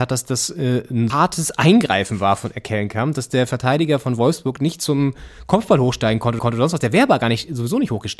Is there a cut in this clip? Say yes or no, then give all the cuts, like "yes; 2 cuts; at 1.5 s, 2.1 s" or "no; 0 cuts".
yes; 2 cuts; at 1.1 s, 6.4 s